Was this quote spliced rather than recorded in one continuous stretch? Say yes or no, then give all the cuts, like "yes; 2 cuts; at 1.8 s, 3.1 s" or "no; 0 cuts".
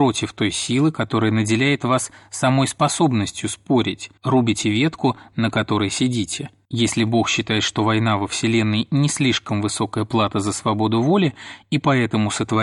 yes; 2 cuts; at 4.2 s, 6.6 s